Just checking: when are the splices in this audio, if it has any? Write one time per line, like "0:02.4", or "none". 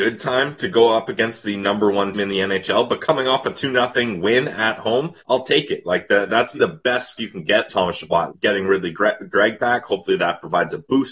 0:02.1
0:05.2
0:06.5
0:07.2
0:07.7
0:08.3